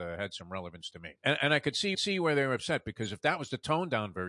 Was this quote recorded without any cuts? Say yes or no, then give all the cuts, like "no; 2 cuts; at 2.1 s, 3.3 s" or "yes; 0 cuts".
no; 2 cuts; at 1.2 s, 1.9 s